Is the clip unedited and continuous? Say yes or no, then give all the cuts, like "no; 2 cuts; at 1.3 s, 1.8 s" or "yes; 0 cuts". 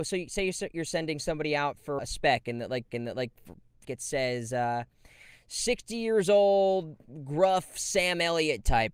no; 3 cuts; at 2.0 s, 2.9 s, 3.8 s